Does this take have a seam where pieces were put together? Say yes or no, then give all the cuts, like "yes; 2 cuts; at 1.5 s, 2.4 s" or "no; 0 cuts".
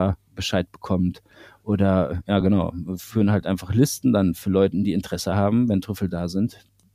no; 0 cuts